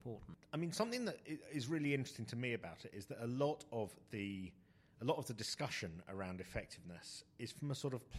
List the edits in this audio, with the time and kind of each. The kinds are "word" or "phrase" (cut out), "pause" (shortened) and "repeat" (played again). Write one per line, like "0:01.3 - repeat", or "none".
none